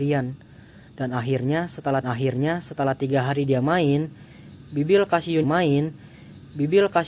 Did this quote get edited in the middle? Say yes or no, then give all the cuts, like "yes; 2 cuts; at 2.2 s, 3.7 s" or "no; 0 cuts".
yes; 2 cuts; at 2.0 s, 5.4 s